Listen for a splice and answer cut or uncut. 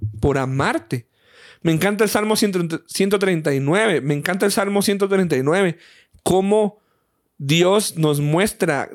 uncut